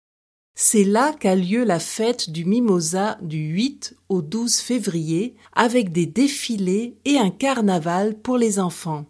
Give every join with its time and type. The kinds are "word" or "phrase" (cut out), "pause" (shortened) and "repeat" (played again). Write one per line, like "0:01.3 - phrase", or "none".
0:05.5 - pause